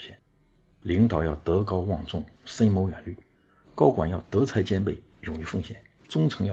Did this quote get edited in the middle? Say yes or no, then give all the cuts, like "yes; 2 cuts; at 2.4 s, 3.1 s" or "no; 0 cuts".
no; 0 cuts